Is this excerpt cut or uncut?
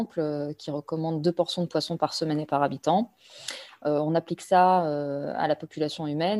uncut